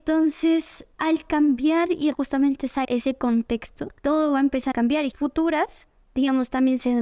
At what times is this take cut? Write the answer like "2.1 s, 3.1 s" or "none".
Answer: 0.9 s, 2.1 s, 2.8 s, 4.0 s, 4.7 s, 5.1 s